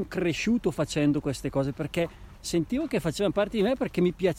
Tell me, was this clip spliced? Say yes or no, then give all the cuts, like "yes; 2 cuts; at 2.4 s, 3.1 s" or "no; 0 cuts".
no; 0 cuts